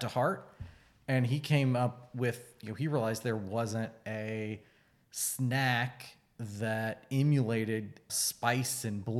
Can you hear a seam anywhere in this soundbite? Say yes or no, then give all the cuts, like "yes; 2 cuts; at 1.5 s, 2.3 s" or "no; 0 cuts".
yes; 1 cut; at 8.1 s